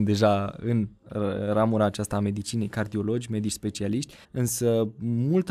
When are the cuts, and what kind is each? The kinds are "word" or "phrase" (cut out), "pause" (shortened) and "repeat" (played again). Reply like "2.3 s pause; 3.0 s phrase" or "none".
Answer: 4.2 s pause